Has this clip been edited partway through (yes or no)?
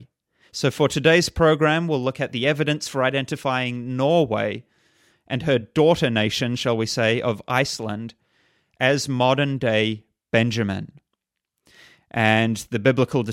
no